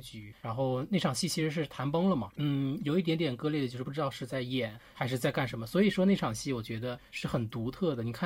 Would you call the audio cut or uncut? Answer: uncut